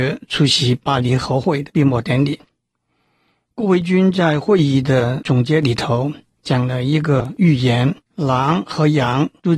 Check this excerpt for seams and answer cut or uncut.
cut